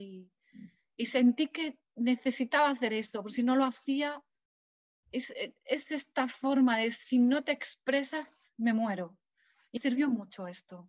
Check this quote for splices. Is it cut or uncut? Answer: cut